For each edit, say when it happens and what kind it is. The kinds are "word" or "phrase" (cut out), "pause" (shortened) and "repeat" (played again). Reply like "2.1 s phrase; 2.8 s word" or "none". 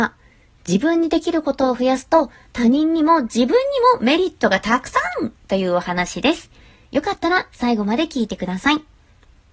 none